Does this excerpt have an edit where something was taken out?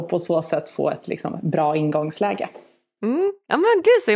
no; 0 cuts

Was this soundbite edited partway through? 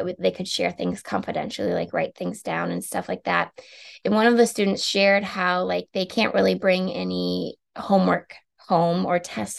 no; 0 cuts

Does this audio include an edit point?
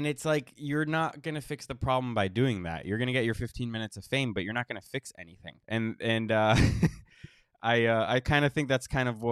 yes; 1 cut; at 5.6 s

